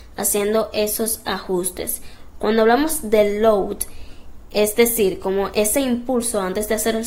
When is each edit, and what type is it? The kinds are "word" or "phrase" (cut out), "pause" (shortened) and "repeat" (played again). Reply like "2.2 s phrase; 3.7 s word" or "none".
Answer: none

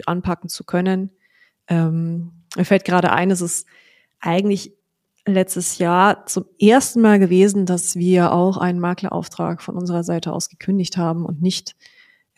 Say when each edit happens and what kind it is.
none

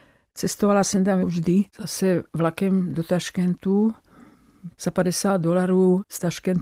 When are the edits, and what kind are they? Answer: 1.2 s phrase; 1.7 s pause; 4.7 s word

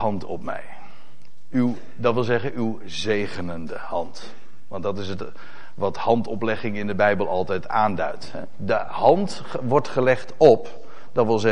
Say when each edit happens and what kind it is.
none

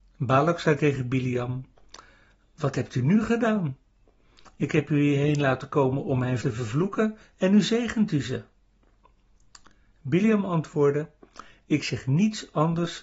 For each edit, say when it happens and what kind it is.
6.4 s word

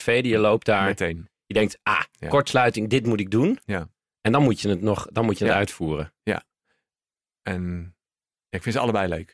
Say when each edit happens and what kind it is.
none

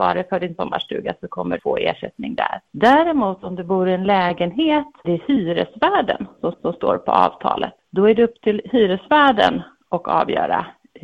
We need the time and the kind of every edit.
1.6 s word; 2.7 s pause; 5.0 s word; 6.5 s repeat; 7.8 s pause

